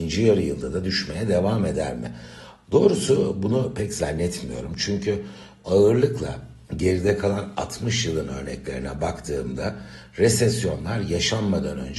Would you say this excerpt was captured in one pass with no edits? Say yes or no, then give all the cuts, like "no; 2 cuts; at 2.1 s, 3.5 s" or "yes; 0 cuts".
no; 1 cut; at 6.6 s